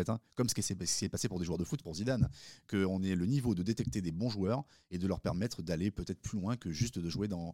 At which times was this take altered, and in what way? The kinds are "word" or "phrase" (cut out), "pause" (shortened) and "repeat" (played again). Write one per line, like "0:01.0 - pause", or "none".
0:01.8 - word